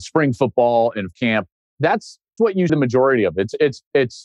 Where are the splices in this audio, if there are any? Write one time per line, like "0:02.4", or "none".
0:01.1
0:02.4
0:02.7